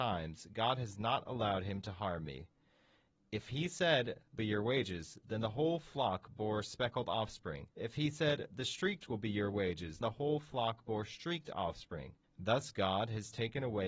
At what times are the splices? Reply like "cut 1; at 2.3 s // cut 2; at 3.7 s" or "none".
cut 1; at 4.4 s // cut 2; at 7.7 s // cut 3; at 10.0 s // cut 4; at 12.2 s